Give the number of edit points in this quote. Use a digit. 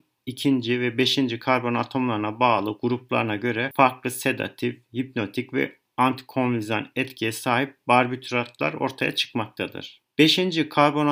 0